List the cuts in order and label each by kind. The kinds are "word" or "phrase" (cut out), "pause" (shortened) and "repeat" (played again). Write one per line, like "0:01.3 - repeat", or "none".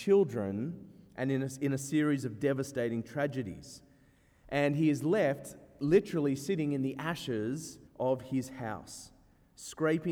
0:07.9 - pause